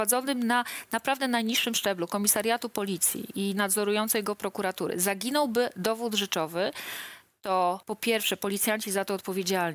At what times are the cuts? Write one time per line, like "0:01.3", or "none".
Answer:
0:07.8